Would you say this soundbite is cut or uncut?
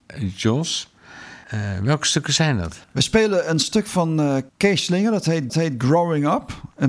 cut